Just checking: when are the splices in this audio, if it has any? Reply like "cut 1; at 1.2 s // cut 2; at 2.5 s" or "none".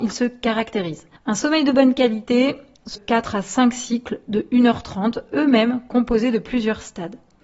cut 1; at 1.2 s // cut 2; at 2.9 s